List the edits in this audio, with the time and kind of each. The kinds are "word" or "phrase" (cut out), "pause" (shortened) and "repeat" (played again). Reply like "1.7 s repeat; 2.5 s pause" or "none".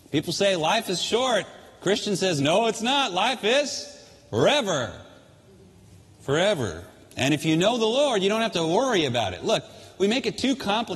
none